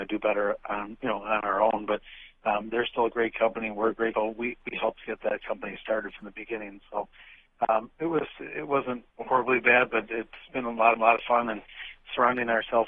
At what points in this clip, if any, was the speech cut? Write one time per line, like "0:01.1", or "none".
0:04.1
0:09.1
0:11.0